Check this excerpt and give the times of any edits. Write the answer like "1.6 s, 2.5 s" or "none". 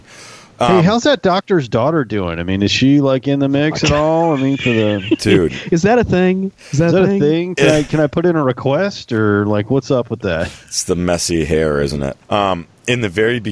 12.2 s